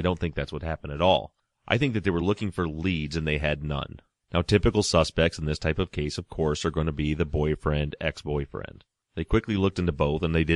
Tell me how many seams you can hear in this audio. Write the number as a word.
zero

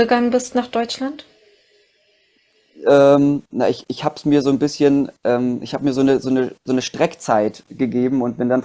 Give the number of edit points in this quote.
zero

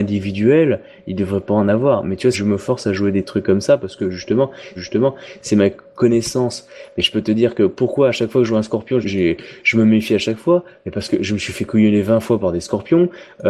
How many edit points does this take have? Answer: three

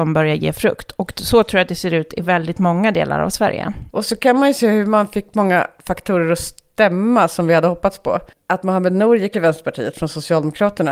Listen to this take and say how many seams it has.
one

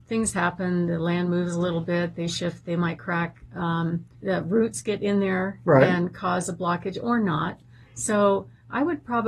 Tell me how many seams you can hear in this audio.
one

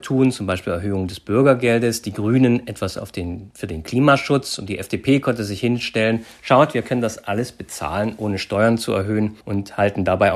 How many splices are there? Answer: one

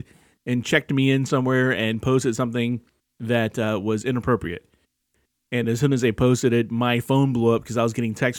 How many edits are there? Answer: zero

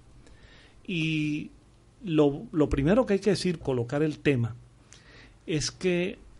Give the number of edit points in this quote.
one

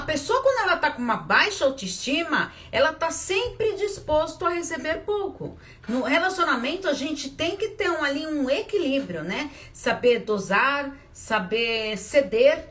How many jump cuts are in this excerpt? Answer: zero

